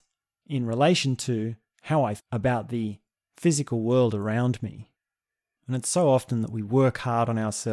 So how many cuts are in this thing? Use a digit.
1